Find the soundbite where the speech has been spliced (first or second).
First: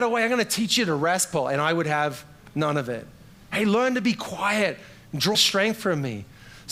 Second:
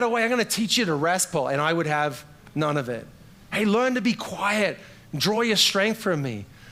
first